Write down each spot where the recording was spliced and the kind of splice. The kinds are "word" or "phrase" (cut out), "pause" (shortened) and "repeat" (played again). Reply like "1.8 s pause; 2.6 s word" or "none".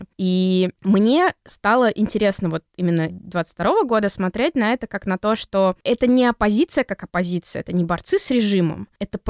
3.1 s word